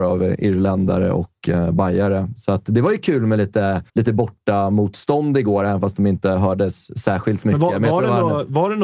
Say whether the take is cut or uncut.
cut